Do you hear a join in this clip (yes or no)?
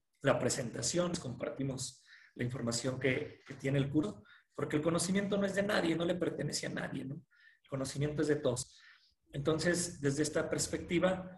no